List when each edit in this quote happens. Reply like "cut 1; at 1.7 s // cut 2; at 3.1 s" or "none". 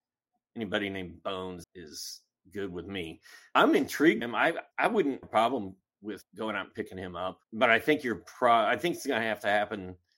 cut 1; at 1.6 s // cut 2; at 4.2 s // cut 3; at 4.7 s // cut 4; at 5.2 s // cut 5; at 7.4 s